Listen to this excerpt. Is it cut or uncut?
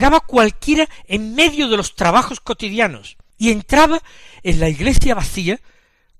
uncut